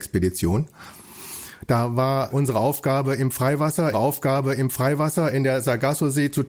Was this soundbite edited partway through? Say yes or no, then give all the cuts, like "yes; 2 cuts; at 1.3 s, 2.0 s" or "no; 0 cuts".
yes; 2 cuts; at 2.3 s, 3.9 s